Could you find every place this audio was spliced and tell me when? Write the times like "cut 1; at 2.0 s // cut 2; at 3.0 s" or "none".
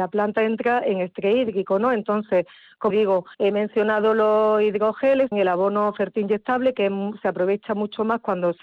cut 1; at 2.9 s // cut 2; at 3.3 s // cut 3; at 5.3 s